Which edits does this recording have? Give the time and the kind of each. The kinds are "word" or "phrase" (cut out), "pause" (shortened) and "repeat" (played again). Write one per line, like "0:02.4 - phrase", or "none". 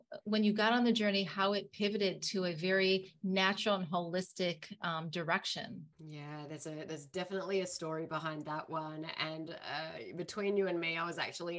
0:05.9 - pause